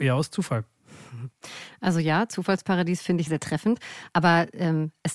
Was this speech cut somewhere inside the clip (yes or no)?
yes